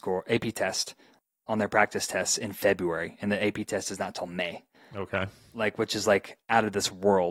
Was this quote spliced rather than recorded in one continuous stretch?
no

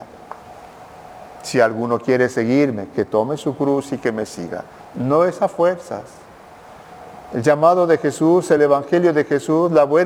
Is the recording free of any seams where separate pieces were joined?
yes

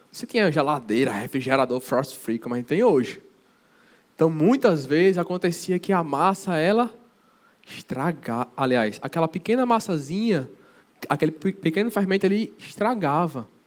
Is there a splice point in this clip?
no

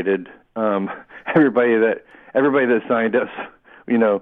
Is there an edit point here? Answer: no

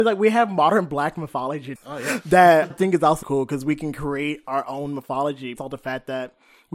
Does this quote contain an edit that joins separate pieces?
yes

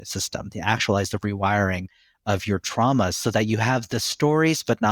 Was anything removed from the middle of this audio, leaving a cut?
no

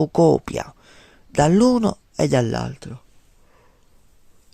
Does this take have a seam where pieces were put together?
no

